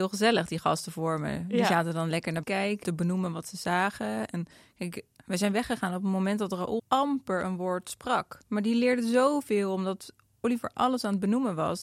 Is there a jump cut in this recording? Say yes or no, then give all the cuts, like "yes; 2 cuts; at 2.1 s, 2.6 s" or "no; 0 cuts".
yes; 4 cuts; at 2.4 s, 2.8 s, 6.8 s, 8.4 s